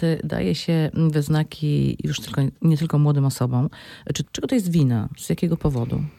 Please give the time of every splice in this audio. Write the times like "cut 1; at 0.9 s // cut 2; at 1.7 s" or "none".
cut 1; at 4.2 s

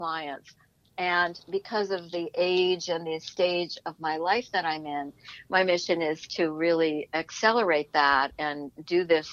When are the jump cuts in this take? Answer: none

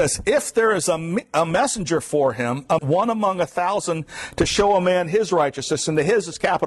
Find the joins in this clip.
cut 1; at 2.8 s

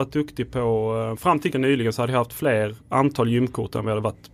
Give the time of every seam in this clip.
cut 1; at 1.1 s // cut 2; at 1.5 s // cut 3; at 2.8 s

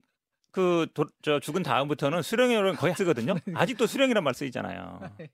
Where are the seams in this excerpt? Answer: cut 1; at 2.9 s

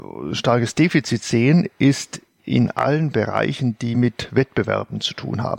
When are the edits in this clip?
none

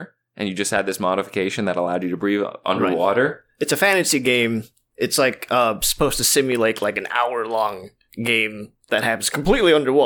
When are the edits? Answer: none

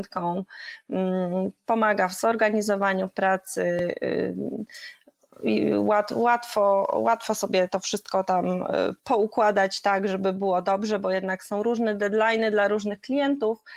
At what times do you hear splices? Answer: none

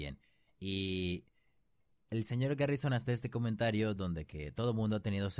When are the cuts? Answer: none

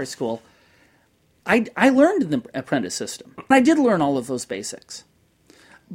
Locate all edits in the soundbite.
cut 1; at 3.5 s

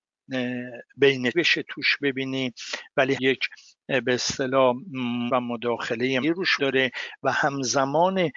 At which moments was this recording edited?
cut 1; at 1.3 s // cut 2; at 3.2 s // cut 3; at 5.3 s // cut 4; at 6.2 s // cut 5; at 6.6 s

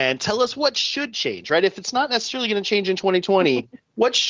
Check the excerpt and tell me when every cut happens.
none

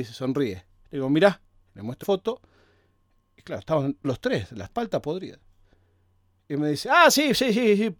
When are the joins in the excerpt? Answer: cut 1; at 2.0 s // cut 2; at 4.0 s // cut 3; at 4.7 s

